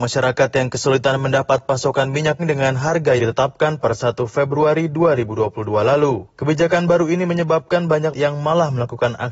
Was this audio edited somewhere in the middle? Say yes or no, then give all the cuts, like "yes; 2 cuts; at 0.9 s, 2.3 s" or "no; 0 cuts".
yes; 4 cuts; at 2.4 s, 3.2 s, 3.8 s, 8.1 s